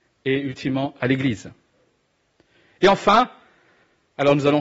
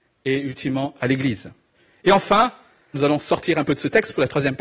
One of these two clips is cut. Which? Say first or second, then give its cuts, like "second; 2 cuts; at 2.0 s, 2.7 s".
second; 2 cuts; at 1.7 s, 2.9 s